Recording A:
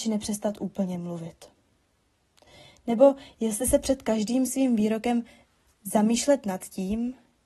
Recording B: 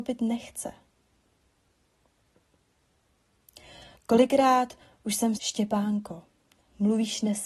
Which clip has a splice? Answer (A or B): B